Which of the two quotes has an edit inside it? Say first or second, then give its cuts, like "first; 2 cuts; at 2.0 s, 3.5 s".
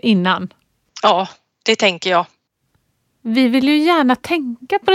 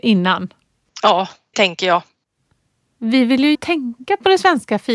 second; 2 cuts; at 1.5 s, 3.5 s